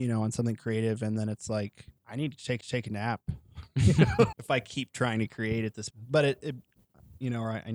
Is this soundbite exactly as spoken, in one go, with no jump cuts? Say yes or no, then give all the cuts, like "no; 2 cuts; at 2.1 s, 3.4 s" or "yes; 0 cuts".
no; 4 cuts; at 2.0 s, 2.6 s, 4.3 s, 5.9 s